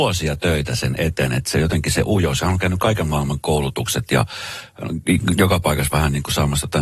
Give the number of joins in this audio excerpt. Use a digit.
0